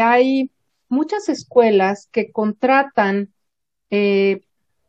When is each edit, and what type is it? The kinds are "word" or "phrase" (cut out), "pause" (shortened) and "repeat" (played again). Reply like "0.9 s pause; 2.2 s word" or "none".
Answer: none